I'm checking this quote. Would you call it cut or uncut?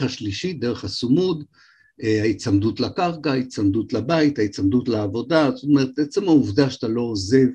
uncut